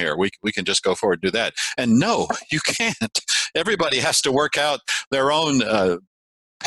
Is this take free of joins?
yes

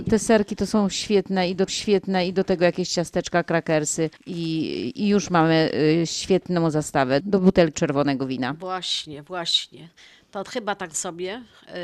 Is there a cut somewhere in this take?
yes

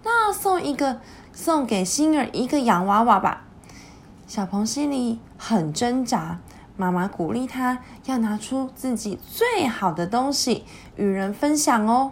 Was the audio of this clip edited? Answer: yes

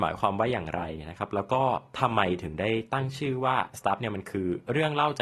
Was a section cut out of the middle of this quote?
yes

